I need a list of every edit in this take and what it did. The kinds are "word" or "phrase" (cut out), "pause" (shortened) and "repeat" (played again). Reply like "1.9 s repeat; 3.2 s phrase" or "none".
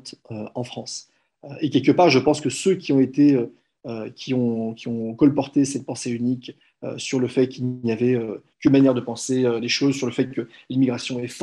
none